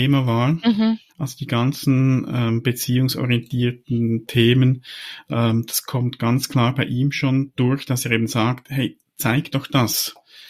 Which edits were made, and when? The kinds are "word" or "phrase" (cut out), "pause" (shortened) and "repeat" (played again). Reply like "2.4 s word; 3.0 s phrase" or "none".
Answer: 1.1 s pause